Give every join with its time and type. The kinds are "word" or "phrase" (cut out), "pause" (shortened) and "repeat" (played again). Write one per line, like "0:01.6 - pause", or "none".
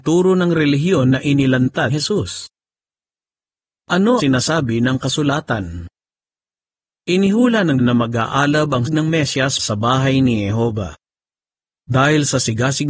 0:01.9 - word
0:04.2 - word
0:07.8 - word
0:08.9 - word
0:09.6 - word